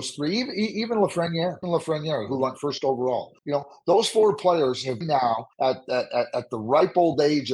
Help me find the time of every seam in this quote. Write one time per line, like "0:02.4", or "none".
0:01.6
0:03.4
0:05.0
0:05.5